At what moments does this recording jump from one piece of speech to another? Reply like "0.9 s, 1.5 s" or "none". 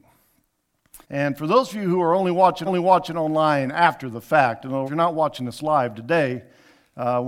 1.0 s, 2.7 s, 4.9 s

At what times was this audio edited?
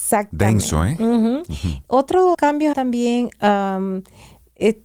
2.3 s, 2.7 s

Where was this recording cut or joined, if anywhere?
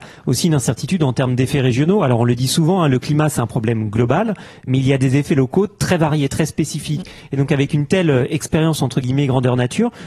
none

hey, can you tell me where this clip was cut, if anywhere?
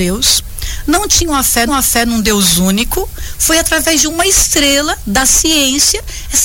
1.7 s

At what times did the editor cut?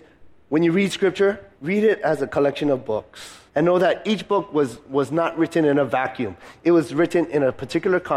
1.5 s, 3.5 s

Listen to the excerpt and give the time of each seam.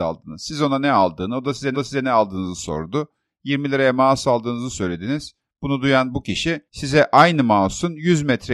1.7 s, 6.7 s

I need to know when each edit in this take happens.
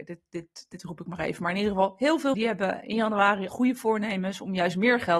2.3 s, 3.5 s

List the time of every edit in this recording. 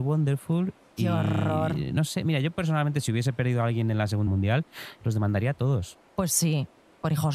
4.3 s

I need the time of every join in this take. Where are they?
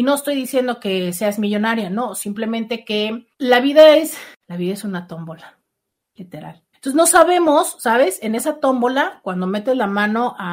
3.3 s, 4.4 s, 6.7 s

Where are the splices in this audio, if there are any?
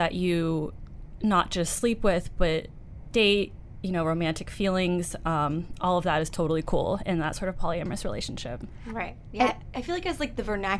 none

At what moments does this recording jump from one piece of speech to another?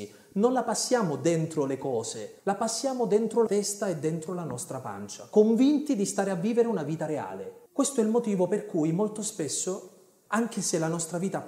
2.4 s, 3.5 s, 7.7 s

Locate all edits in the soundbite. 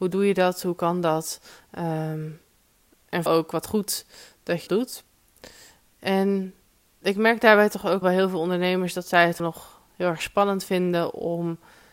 3.3 s, 4.7 s, 8.0 s, 9.4 s

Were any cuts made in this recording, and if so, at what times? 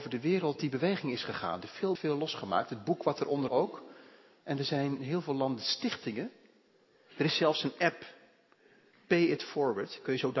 2.0 s, 3.5 s, 5.0 s

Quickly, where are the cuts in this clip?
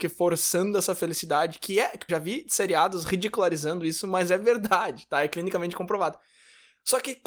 2.1 s

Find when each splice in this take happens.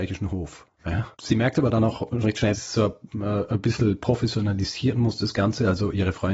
1.1 s, 2.2 s, 2.5 s

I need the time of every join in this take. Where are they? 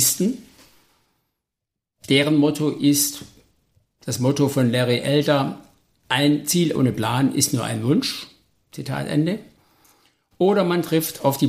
none

